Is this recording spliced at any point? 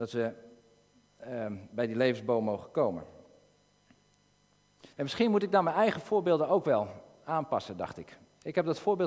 yes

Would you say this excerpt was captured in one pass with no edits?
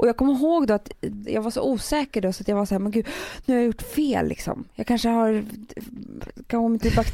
yes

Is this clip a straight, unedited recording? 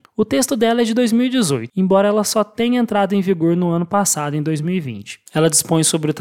no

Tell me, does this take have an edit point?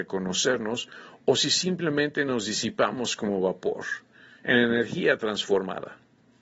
no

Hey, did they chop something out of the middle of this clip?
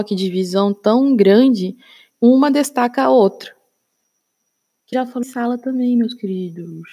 yes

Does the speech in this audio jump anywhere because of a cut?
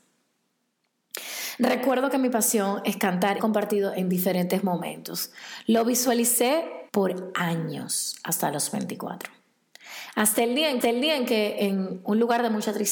yes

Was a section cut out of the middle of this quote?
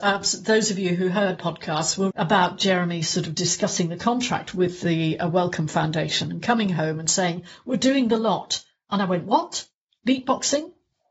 yes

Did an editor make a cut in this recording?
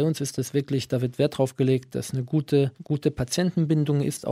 yes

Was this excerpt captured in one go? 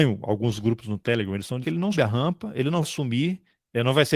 no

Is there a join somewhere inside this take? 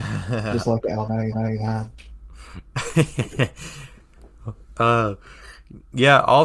yes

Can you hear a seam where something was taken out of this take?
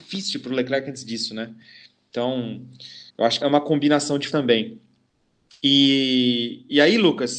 yes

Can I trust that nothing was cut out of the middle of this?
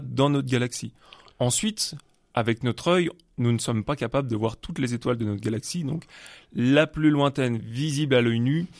yes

